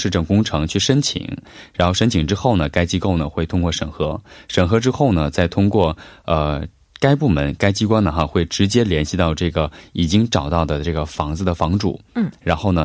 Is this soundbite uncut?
yes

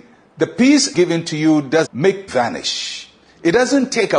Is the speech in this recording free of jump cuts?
no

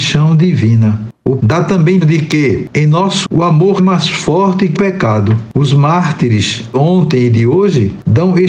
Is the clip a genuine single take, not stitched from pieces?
no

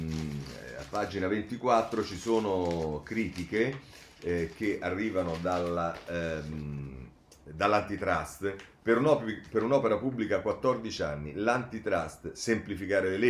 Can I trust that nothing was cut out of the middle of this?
yes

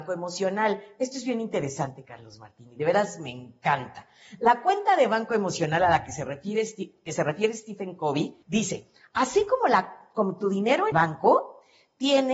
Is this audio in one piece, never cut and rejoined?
no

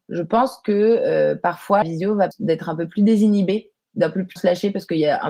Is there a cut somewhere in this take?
yes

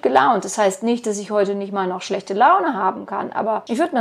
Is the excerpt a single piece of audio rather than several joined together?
yes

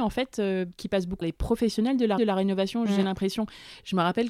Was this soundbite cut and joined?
yes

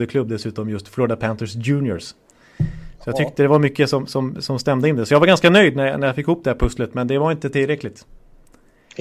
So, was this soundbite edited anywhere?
no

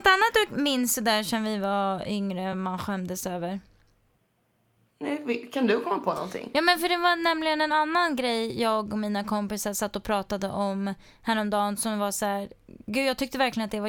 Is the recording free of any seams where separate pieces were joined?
yes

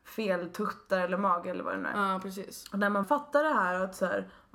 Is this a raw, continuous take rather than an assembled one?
no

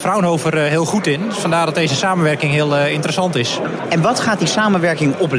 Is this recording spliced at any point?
no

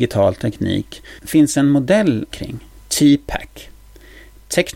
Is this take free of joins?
no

